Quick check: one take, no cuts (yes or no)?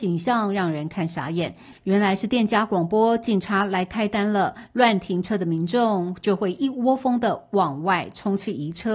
no